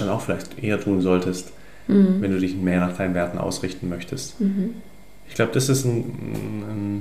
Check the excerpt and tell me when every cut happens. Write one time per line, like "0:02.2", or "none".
none